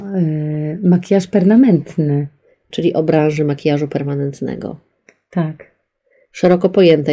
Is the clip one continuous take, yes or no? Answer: yes